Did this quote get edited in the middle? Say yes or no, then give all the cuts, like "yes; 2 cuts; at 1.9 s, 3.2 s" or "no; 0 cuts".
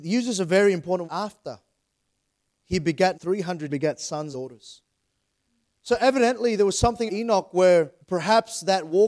yes; 6 cuts; at 1.0 s, 3.1 s, 3.7 s, 4.3 s, 7.1 s, 8.0 s